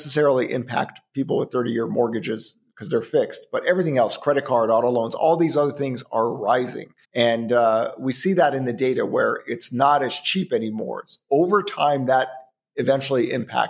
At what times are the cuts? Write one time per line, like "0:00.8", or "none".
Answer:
0:07.0